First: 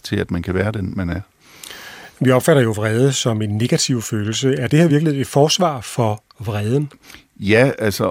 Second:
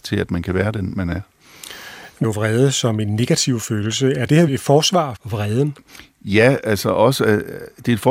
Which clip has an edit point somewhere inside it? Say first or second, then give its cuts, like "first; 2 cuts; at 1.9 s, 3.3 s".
second; 3 cuts; at 2.2 s, 4.5 s, 5.2 s